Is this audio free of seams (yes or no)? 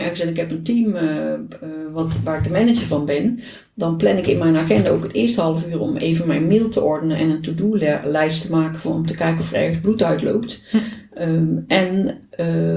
yes